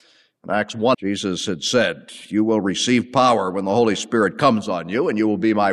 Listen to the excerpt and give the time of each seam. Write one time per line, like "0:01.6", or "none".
0:00.9